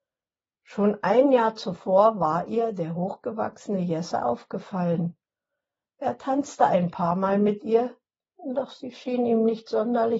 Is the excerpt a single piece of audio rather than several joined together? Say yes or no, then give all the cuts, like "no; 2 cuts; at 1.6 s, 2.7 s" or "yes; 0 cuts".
yes; 0 cuts